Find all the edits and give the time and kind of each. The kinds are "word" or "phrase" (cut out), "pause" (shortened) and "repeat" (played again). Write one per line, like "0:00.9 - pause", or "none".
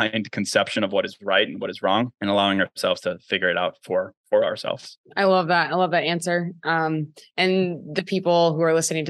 none

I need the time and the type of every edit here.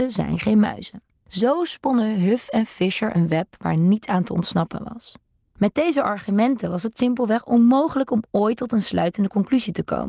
0:01.1 - pause
0:05.2 - pause

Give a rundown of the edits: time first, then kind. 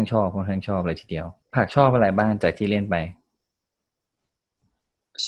0:01.4 - pause

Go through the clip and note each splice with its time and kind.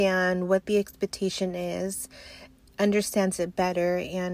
none

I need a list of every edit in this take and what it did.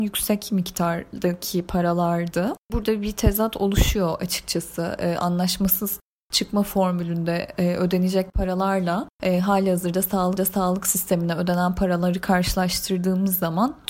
0:10.4 - repeat

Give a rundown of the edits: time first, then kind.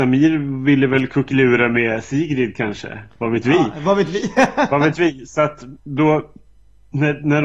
0:05.8 - pause

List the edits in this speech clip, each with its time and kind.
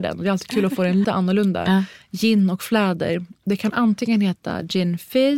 0:01.0 - word

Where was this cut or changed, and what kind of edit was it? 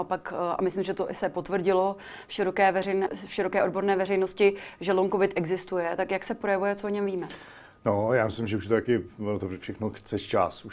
0:03.1 - word

